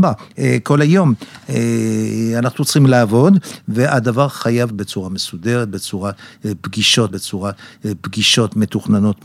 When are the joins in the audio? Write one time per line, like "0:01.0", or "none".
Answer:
0:04.7
0:07.1